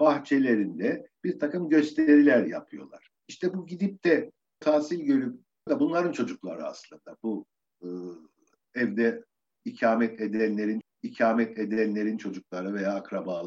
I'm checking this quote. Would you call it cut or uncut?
cut